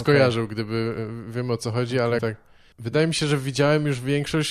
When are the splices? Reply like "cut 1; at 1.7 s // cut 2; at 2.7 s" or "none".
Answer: cut 1; at 2.2 s